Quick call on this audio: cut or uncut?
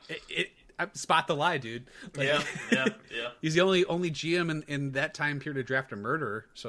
uncut